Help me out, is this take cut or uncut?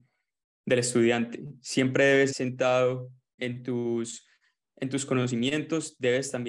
cut